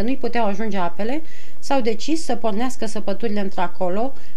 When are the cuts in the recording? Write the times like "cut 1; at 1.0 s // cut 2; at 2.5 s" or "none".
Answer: none